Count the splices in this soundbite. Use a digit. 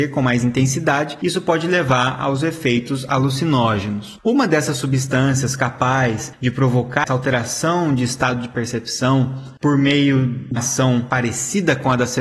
2